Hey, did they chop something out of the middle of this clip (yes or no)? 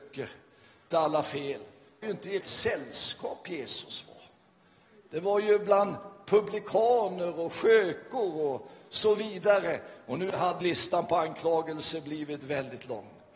yes